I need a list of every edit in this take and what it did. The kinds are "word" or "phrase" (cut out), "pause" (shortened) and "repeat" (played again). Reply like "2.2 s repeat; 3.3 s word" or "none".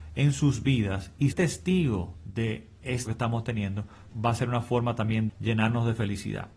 1.3 s word; 3.1 s word; 4.1 s word; 5.3 s word